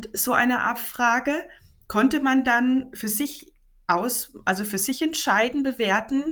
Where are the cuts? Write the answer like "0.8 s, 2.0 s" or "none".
none